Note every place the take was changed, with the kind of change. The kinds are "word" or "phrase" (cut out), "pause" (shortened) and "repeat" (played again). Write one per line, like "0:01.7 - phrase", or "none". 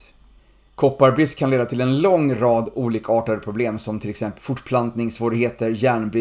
0:04.4 - word